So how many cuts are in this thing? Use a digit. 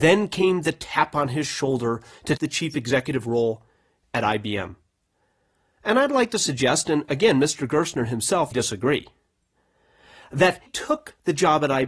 3